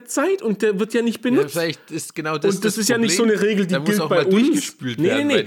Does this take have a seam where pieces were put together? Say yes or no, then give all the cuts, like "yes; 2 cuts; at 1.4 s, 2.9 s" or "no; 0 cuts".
no; 0 cuts